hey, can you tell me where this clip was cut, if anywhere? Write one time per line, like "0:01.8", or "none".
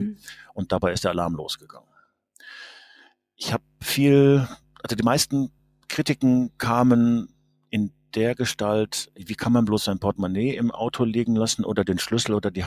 none